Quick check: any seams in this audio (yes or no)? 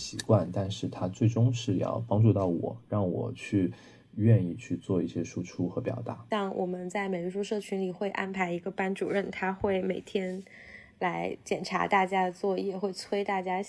no